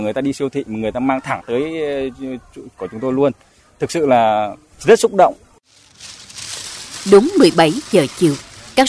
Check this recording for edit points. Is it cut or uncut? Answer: uncut